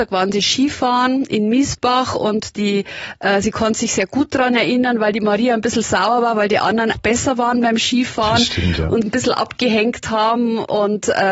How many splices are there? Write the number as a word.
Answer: two